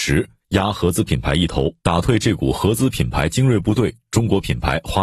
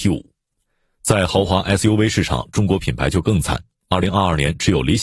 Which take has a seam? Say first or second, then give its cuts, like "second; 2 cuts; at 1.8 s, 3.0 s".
first; 1 cut; at 1.8 s